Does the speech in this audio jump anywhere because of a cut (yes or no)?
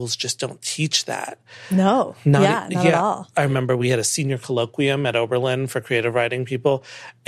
no